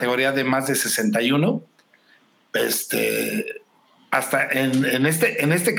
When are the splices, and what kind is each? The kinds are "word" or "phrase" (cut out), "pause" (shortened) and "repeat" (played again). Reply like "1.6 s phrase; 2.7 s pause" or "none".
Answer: none